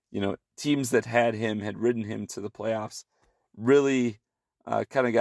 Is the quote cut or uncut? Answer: uncut